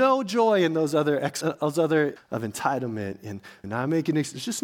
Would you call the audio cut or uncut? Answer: cut